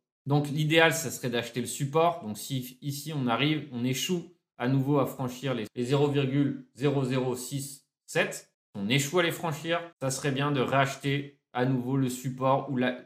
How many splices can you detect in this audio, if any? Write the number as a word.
two